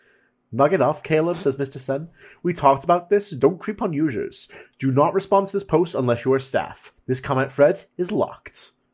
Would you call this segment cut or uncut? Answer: uncut